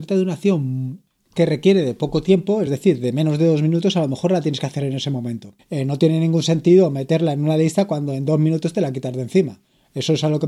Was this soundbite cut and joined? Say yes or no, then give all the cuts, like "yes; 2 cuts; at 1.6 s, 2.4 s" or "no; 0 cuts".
no; 0 cuts